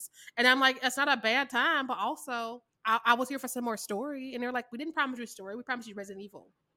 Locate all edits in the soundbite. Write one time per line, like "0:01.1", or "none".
0:02.7